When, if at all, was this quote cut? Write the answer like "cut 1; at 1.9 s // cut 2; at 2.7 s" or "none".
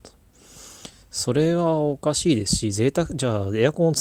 none